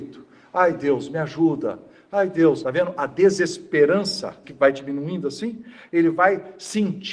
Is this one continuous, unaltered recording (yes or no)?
no